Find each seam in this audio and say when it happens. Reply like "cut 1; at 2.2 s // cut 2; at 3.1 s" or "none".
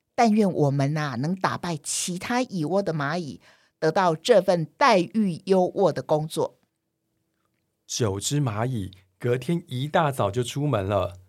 none